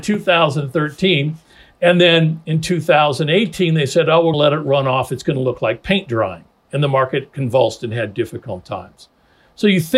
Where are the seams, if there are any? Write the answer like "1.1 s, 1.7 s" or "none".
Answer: 4.3 s